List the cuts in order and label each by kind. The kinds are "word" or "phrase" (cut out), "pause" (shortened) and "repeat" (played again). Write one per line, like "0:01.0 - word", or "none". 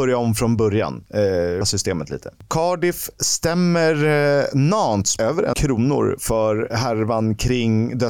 0:01.6 - word
0:05.2 - phrase
0:05.5 - word
0:06.7 - word